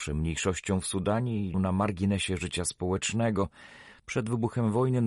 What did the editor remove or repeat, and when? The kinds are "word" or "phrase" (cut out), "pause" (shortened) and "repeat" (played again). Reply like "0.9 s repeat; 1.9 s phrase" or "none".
1.5 s word